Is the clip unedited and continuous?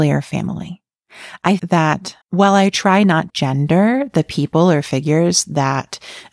no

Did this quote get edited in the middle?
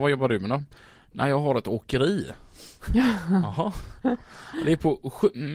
no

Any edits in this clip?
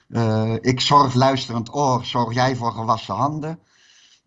yes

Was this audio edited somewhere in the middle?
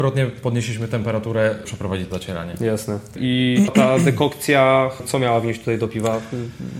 yes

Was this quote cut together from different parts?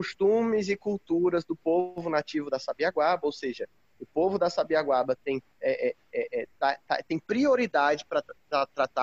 no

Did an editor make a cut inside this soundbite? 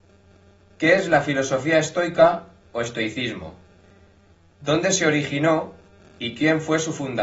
no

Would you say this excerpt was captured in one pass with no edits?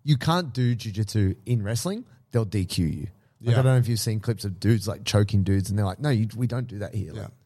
yes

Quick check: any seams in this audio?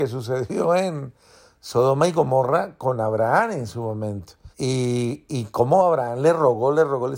yes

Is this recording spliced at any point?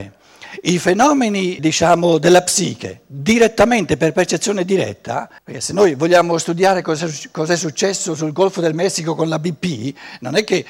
yes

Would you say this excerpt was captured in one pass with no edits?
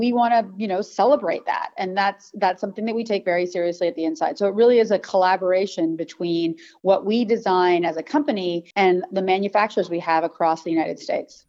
no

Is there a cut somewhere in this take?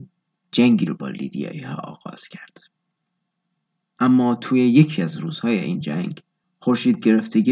no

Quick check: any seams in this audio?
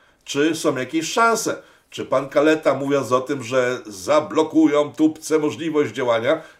no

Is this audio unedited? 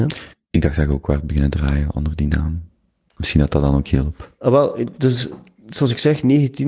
yes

